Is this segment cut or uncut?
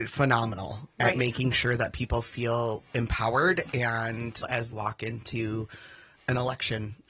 cut